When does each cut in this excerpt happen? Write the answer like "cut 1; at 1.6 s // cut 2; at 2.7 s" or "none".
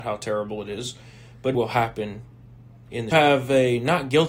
cut 1; at 1.5 s // cut 2; at 3.1 s